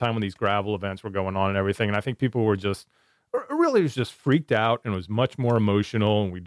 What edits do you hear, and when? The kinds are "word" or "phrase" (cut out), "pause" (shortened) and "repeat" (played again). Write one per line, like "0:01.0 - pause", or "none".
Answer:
none